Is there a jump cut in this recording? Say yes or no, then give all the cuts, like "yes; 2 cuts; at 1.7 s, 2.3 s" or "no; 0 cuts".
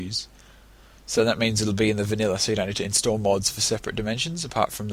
no; 0 cuts